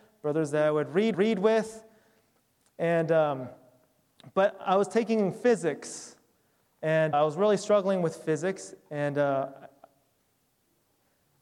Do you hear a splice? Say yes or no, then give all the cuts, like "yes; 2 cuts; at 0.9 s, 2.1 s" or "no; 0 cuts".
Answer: yes; 2 cuts; at 1.1 s, 7.1 s